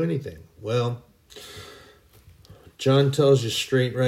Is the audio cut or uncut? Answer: uncut